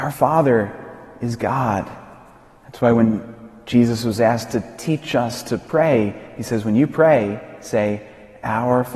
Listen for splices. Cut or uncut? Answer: uncut